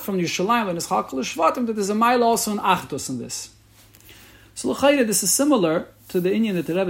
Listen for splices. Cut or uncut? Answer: uncut